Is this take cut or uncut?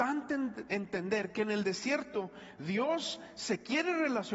uncut